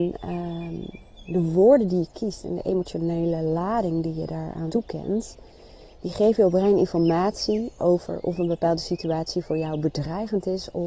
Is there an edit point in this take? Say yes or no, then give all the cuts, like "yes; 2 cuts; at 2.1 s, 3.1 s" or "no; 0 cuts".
yes; 1 cut; at 4.7 s